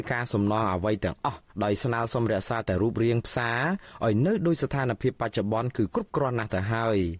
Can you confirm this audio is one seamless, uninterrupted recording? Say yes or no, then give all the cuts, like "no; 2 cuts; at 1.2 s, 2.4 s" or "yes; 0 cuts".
no; 1 cut; at 1.5 s